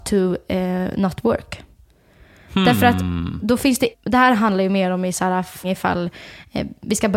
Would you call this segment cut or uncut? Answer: cut